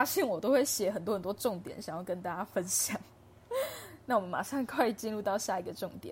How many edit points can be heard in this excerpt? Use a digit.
0